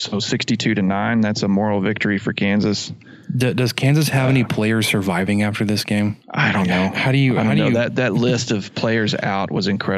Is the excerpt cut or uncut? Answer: cut